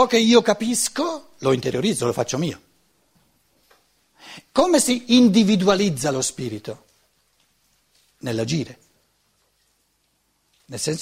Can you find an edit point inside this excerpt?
no; 0 cuts

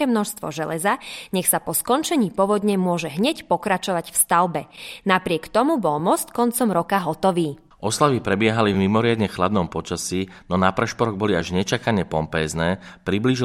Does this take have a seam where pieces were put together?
no; 0 cuts

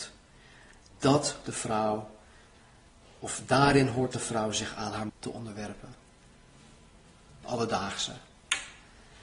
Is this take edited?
yes; 3 cuts; at 1.4 s, 5.1 s, 7.4 s

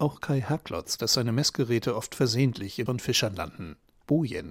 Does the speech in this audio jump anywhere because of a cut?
yes; 2 cuts; at 1.0 s, 2.9 s

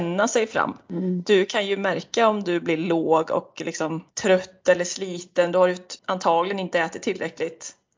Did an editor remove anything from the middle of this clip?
yes; 2 cuts; at 4.1 s, 6.0 s

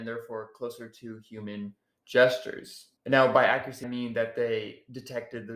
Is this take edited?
yes; 2 cuts; at 3.0 s, 3.8 s

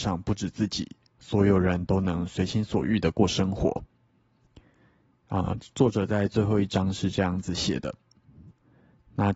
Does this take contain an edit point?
no; 0 cuts

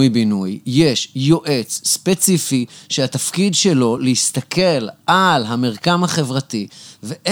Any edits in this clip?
no; 0 cuts

